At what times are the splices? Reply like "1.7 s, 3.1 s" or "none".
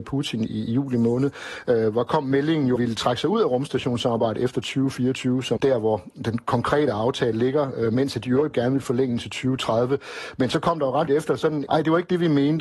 2.8 s, 5.6 s, 8.5 s, 11.1 s, 11.7 s